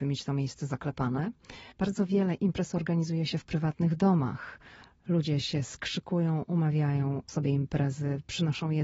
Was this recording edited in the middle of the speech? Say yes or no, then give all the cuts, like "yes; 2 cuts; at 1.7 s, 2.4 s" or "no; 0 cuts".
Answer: yes; 2 cuts; at 1.7 s, 7.3 s